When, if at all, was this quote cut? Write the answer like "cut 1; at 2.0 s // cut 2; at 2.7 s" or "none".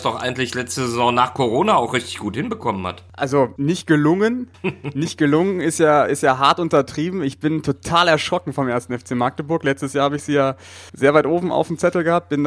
cut 1; at 3.6 s // cut 2; at 10.9 s

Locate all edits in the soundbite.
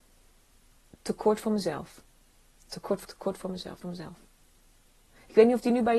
cut 1; at 3.0 s // cut 2; at 3.8 s

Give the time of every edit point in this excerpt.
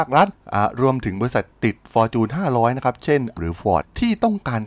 cut 1; at 3.4 s

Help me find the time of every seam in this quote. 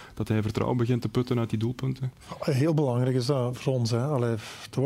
none

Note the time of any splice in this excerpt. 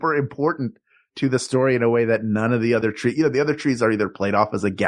none

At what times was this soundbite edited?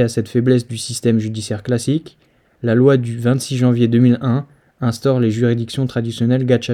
none

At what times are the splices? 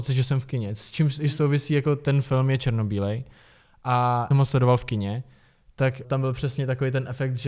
cut 1; at 4.3 s // cut 2; at 6.0 s

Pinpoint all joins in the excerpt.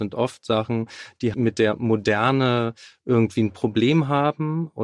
cut 1; at 1.3 s

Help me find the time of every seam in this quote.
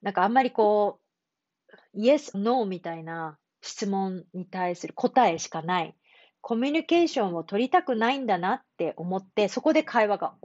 cut 1; at 2.3 s // cut 2; at 3.4 s

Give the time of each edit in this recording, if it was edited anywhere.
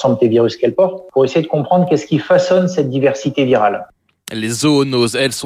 none

